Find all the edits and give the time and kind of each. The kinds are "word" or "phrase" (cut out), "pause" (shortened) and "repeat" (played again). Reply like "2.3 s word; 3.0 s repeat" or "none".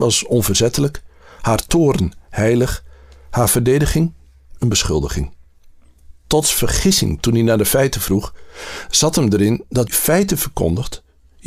9.9 s word